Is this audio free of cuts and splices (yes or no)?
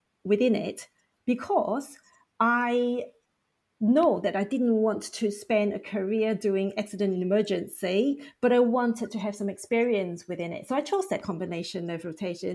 yes